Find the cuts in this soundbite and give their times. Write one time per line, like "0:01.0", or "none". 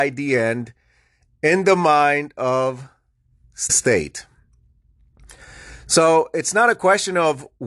0:03.7